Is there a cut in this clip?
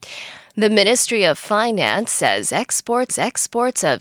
yes; 1 cut; at 3.1 s

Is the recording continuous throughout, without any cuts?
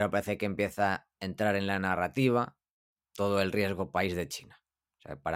yes; 0 cuts

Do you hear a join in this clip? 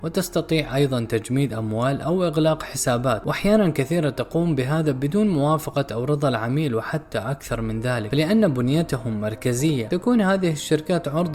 no; 0 cuts

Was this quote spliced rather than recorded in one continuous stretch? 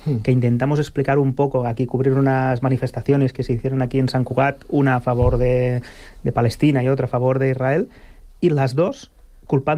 no; 0 cuts

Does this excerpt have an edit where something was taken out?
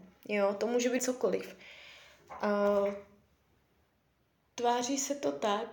yes; 1 cut; at 1.0 s

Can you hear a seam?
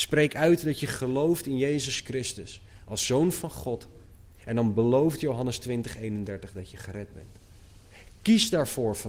no; 0 cuts

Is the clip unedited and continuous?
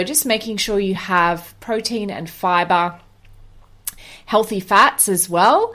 yes; 0 cuts

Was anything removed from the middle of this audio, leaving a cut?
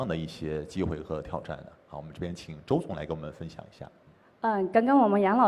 no; 0 cuts

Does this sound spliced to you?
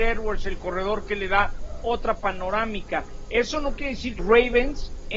yes; 1 cut; at 4.2 s

